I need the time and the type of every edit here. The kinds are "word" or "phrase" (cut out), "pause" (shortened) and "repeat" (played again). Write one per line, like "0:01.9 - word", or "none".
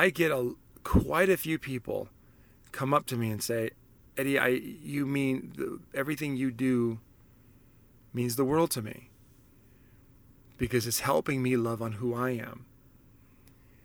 none